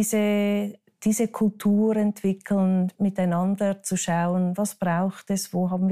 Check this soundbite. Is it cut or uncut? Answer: uncut